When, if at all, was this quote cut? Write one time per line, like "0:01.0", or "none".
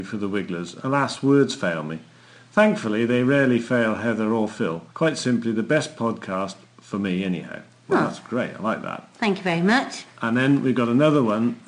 0:04.9